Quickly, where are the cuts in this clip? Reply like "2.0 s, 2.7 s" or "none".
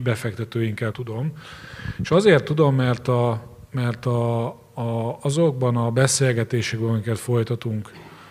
0.9 s